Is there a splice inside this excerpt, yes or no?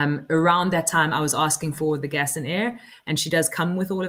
no